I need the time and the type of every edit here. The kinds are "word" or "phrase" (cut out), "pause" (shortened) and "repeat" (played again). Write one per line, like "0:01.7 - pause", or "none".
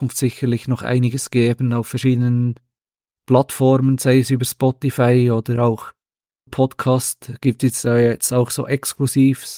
0:06.5 - word